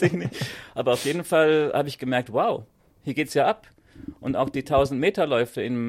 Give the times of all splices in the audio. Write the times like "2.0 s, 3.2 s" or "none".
none